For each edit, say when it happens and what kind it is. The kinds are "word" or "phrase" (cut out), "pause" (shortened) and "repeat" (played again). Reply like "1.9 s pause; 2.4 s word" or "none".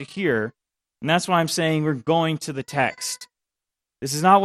none